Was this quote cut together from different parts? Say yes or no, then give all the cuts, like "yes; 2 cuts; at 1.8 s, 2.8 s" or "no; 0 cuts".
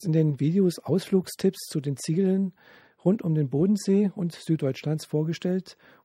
no; 0 cuts